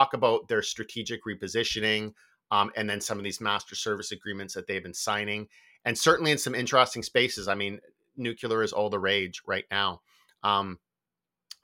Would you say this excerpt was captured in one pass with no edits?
yes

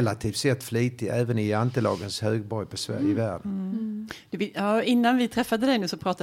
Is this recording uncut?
yes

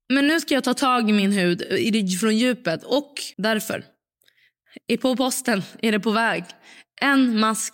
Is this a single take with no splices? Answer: no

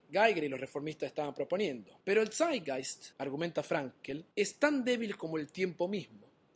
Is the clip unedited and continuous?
no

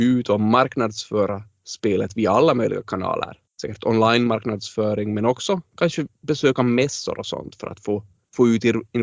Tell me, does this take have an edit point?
no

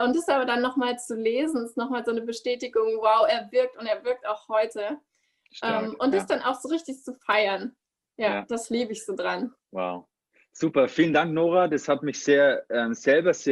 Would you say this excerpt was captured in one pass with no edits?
yes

